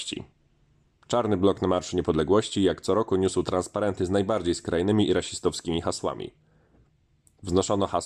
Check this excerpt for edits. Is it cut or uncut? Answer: uncut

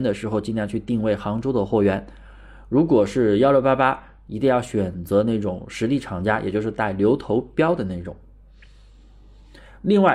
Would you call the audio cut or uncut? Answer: uncut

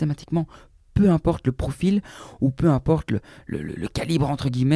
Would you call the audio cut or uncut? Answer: uncut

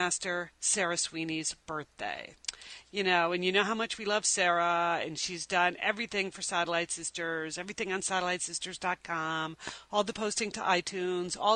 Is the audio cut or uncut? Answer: uncut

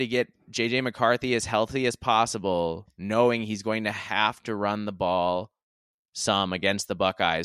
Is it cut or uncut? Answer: uncut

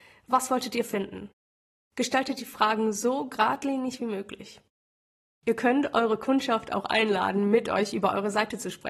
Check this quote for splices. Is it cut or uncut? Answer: uncut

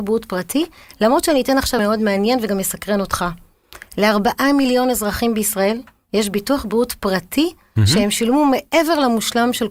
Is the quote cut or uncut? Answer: cut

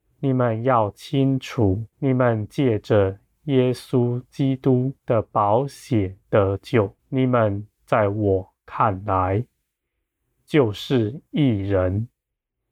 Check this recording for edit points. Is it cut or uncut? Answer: cut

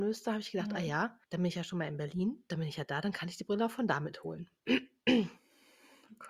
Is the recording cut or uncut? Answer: cut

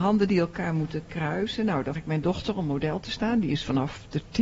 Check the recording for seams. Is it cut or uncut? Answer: cut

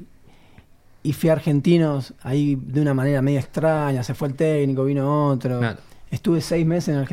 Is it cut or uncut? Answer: uncut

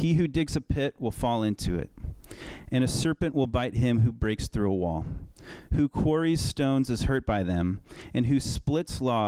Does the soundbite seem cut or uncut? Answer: uncut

